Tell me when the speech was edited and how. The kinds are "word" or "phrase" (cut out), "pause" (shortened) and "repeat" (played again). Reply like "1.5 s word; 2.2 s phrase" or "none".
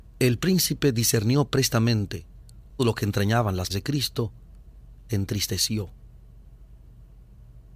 2.8 s word; 3.7 s word; 5.1 s phrase